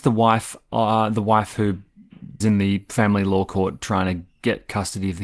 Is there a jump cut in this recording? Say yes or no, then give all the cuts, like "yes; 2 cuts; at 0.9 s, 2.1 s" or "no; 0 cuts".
yes; 1 cut; at 2.4 s